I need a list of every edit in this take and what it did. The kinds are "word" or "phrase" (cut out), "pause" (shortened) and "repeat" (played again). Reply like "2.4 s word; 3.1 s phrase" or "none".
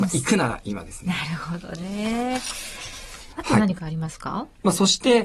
none